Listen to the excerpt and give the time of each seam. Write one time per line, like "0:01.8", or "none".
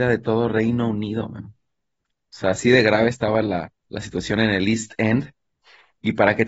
0:03.8